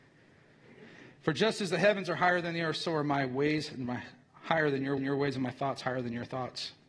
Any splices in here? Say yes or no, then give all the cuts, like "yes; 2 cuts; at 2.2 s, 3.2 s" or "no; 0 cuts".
yes; 1 cut; at 5.0 s